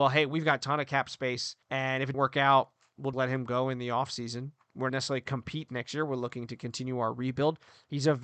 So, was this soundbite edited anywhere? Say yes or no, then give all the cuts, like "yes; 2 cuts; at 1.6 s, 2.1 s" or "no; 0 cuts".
yes; 5 cuts; at 1.6 s, 2.1 s, 3.1 s, 4.9 s, 5.7 s